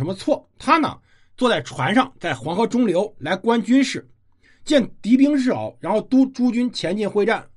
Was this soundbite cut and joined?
no; 0 cuts

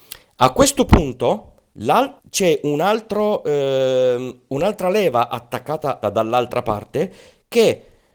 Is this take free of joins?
no; 2 cuts; at 2.2 s, 6.0 s

